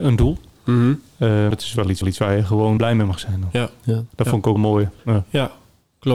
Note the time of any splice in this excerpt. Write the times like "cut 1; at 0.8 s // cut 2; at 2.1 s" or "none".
cut 1; at 1.5 s // cut 2; at 2.0 s // cut 3; at 2.8 s // cut 4; at 4.1 s // cut 5; at 4.6 s // cut 6; at 5.0 s